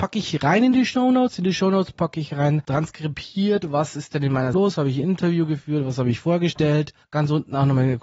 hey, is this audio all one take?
no; 2 cuts; at 4.5 s, 7.0 s

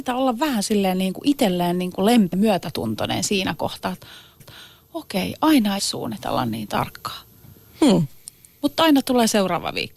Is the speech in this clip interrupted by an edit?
yes; 3 cuts; at 2.3 s, 4.4 s, 5.8 s

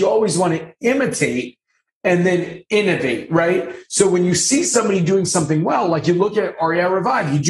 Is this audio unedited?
yes; 0 cuts

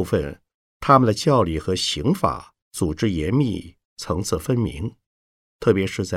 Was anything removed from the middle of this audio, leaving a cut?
yes; 1 cut; at 2.6 s

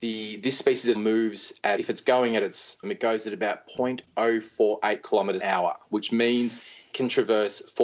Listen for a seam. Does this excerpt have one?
yes; 5 cuts; at 0.9 s, 1.8 s, 2.8 s, 5.4 s, 6.9 s

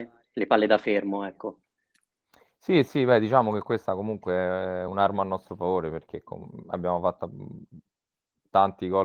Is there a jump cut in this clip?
no; 0 cuts

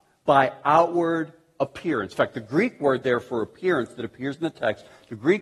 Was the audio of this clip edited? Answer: no; 0 cuts

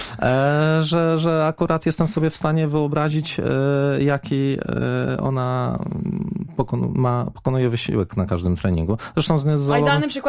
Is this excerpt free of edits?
yes; 0 cuts

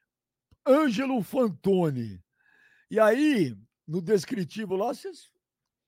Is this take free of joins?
yes; 0 cuts

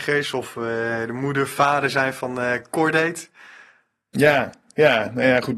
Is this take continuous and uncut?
yes; 0 cuts

